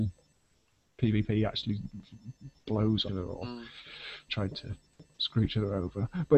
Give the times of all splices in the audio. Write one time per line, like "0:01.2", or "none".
0:03.1
0:04.3